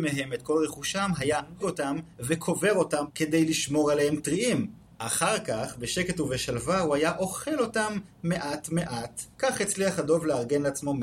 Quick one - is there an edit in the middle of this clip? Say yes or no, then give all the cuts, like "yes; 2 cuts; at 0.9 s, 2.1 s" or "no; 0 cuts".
yes; 4 cuts; at 1.6 s, 3.1 s, 4.8 s, 9.3 s